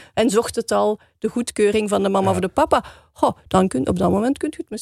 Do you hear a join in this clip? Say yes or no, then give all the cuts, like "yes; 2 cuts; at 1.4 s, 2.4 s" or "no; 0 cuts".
no; 0 cuts